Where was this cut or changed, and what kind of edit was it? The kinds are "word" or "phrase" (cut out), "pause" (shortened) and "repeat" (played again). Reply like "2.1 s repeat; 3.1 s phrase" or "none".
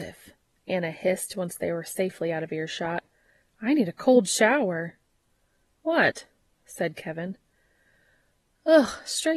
none